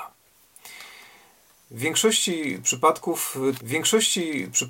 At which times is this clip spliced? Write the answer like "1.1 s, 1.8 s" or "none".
3.6 s